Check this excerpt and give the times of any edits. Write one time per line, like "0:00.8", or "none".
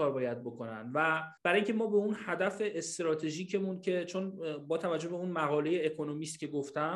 0:01.4